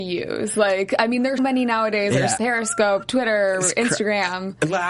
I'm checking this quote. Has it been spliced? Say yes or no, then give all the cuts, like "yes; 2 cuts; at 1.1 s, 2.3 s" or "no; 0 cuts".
yes; 2 cuts; at 1.4 s, 2.4 s